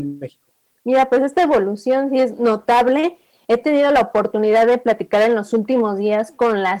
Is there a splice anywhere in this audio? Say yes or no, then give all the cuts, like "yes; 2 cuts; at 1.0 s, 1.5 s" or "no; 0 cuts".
no; 0 cuts